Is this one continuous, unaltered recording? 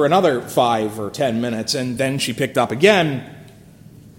yes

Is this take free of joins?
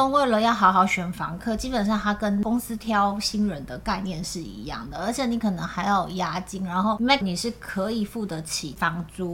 no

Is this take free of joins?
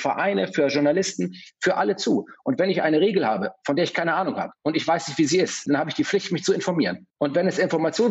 no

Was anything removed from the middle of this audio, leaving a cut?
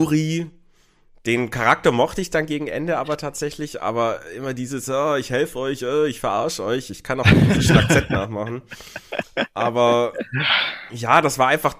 no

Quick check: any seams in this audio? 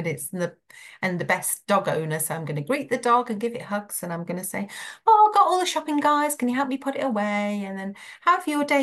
no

